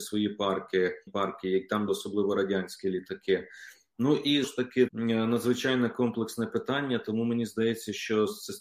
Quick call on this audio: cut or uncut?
cut